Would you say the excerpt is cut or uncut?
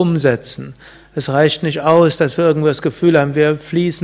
uncut